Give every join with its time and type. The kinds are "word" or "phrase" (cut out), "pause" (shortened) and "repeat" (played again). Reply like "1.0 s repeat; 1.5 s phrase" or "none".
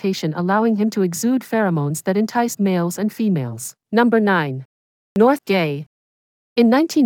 2.6 s word; 3.8 s pause; 5.4 s word

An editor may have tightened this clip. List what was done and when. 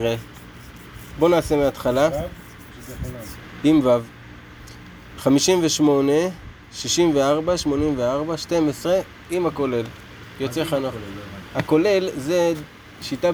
6.6 s pause

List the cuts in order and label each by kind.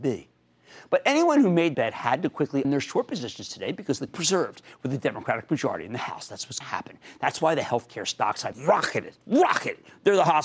1.7 s word; 2.6 s word; 4.1 s phrase; 6.6 s word; 8.5 s word; 9.2 s pause

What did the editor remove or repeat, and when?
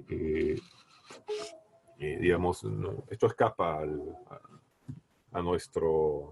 none

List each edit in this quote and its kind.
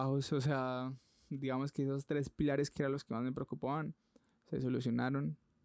none

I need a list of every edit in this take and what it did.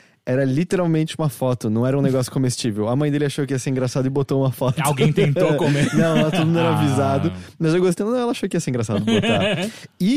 8.0 s word

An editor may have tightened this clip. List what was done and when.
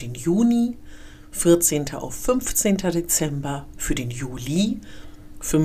none

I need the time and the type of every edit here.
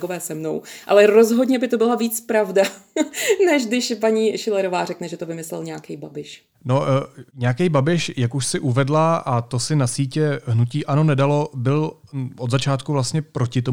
6.5 s pause; 7.3 s pause

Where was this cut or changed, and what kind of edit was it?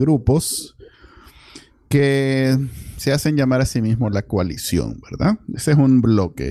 none

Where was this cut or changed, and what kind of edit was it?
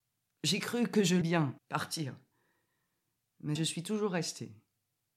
1.2 s word; 1.6 s pause; 3.6 s phrase

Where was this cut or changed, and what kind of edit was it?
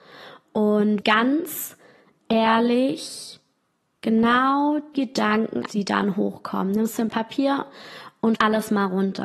1.0 s word; 4.9 s word; 5.7 s word; 7.1 s word; 8.3 s word

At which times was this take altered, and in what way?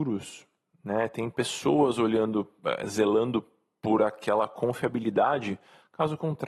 none

